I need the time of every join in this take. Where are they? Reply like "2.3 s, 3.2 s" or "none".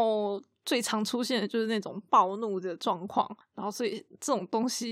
3.4 s